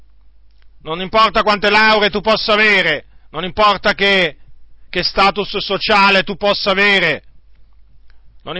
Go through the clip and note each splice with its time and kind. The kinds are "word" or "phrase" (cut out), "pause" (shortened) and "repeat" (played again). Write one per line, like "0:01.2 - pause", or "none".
none